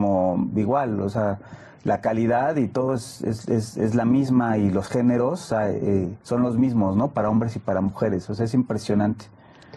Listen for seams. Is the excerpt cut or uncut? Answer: cut